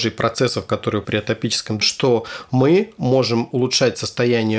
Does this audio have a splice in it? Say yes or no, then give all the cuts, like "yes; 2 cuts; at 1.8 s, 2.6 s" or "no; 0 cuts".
yes; 2 cuts; at 1.0 s, 1.8 s